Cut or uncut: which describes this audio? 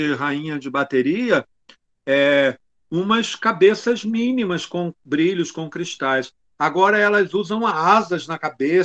uncut